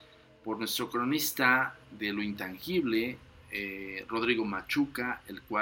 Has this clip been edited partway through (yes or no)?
no